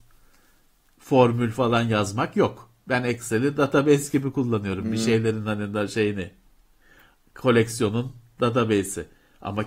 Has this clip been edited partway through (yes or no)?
no